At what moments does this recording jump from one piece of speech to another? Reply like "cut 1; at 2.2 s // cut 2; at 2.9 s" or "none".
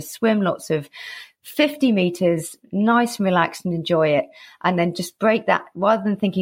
none

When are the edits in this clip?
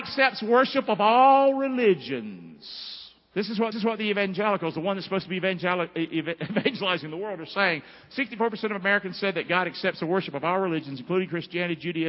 cut 1; at 3.7 s

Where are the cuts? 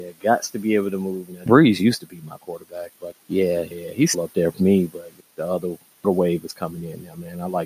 cut 1; at 1.5 s // cut 2; at 2.4 s // cut 3; at 3.1 s // cut 4; at 3.7 s // cut 5; at 4.1 s // cut 6; at 4.5 s // cut 7; at 5.2 s // cut 8; at 6.0 s

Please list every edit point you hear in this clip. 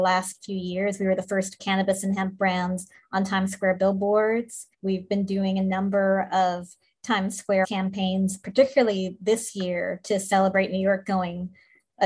cut 1; at 1.6 s // cut 2; at 4.7 s // cut 3; at 7.6 s

